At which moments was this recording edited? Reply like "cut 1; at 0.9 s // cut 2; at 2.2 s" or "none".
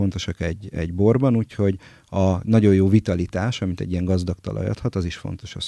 none